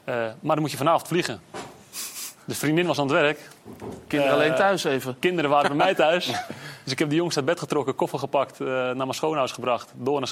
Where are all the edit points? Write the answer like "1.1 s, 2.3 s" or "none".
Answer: none